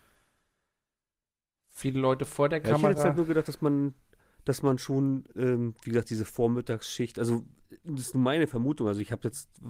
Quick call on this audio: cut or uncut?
uncut